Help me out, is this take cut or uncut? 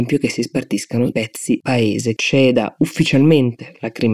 cut